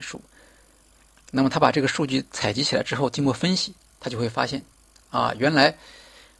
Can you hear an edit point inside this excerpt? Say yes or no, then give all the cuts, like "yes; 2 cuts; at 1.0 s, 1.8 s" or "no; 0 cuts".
no; 0 cuts